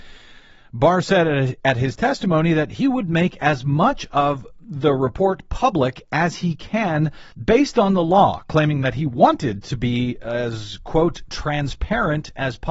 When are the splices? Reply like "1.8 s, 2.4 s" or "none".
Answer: 7.3 s